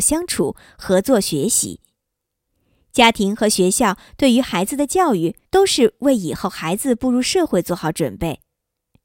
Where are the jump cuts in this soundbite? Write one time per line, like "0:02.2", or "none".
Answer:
0:05.5